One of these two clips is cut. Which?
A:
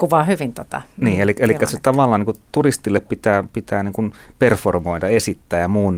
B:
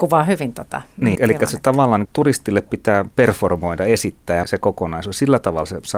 B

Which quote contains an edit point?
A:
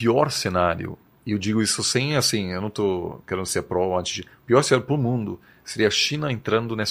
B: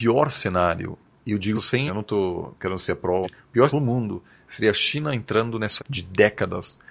B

